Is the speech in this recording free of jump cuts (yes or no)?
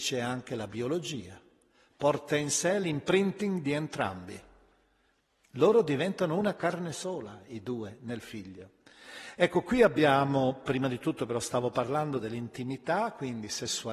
yes